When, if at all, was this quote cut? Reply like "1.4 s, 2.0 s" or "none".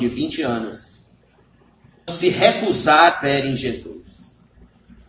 2.1 s, 3.1 s